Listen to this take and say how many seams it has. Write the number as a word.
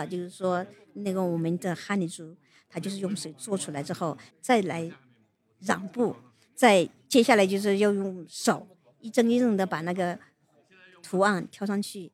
one